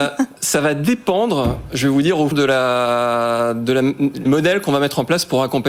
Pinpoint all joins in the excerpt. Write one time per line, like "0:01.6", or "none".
0:02.3
0:04.3

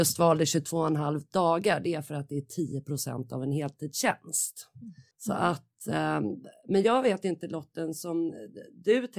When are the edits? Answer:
0:05.1

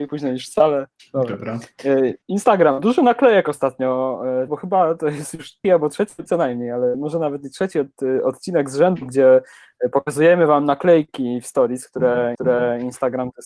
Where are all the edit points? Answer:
0:01.0
0:02.2
0:04.5
0:05.6
0:06.3
0:12.3

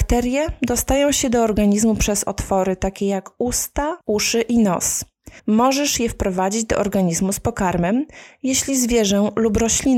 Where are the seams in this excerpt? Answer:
0:04.0
0:05.4

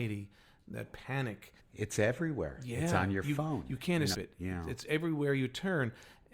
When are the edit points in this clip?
0:01.6
0:04.1

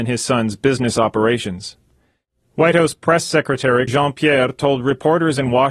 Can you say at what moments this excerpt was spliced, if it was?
0:03.9

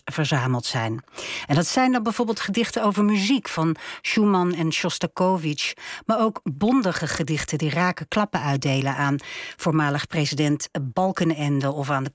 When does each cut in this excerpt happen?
none

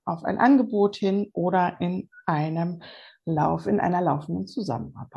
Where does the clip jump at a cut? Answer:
none

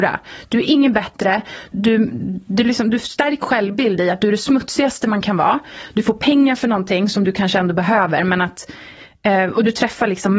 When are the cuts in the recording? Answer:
0:01.7
0:03.4

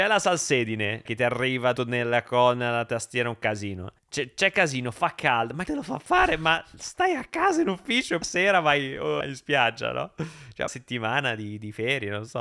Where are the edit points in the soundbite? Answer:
0:01.1
0:01.8
0:04.0
0:05.7
0:08.2
0:09.2
0:10.7

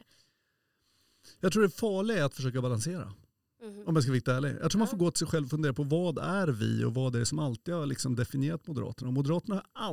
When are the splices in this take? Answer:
none

